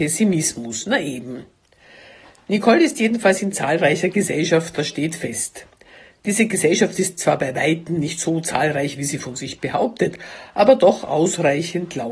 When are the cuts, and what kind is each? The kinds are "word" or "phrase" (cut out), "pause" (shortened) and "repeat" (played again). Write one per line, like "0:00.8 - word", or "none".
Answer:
none